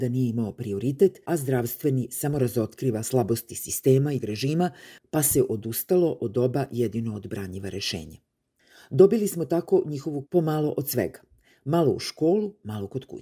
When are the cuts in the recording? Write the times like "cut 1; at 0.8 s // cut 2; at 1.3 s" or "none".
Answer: cut 1; at 1.2 s // cut 2; at 4.2 s // cut 3; at 10.2 s